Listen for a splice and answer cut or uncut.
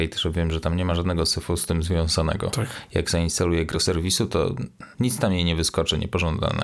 cut